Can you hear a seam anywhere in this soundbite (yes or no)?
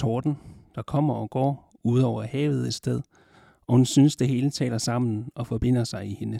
no